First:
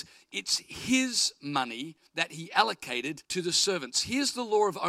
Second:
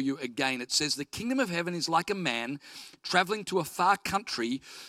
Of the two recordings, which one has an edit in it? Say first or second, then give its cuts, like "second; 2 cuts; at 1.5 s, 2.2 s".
first; 2 cuts; at 2.1 s, 3.2 s